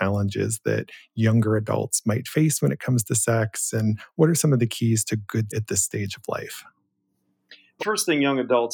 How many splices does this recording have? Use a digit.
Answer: 2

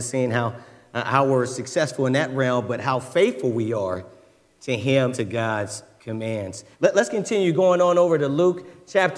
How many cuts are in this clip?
3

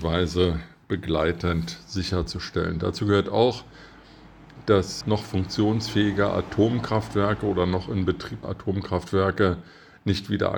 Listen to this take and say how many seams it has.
2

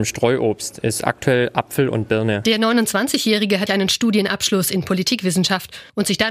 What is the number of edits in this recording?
1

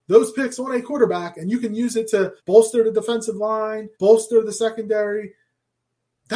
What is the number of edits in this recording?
2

